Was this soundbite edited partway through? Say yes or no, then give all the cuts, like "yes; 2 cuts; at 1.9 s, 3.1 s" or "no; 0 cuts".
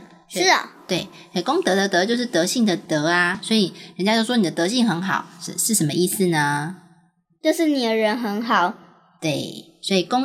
no; 0 cuts